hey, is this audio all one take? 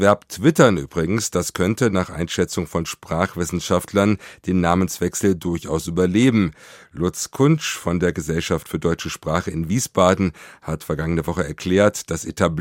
yes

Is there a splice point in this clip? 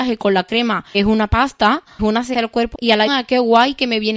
yes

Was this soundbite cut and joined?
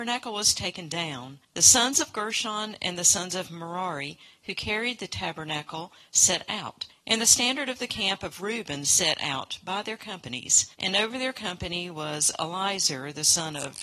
yes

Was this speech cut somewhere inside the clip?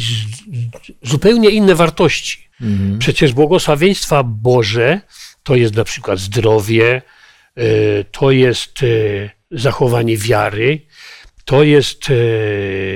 yes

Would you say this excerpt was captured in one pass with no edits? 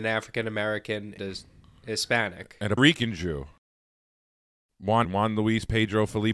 no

